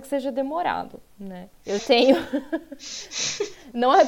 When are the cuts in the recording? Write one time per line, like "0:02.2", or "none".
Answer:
0:01.8